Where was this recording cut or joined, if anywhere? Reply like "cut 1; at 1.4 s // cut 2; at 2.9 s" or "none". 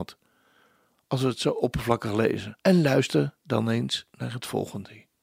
cut 1; at 2.6 s